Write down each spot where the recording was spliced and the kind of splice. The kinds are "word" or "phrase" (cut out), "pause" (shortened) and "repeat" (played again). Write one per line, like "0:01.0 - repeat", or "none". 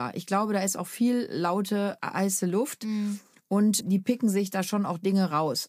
none